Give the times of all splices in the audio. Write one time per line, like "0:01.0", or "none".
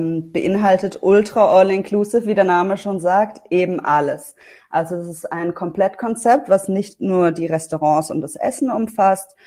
none